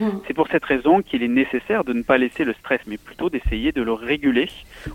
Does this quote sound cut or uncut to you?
cut